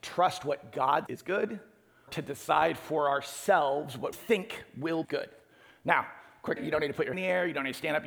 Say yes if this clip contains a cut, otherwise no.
yes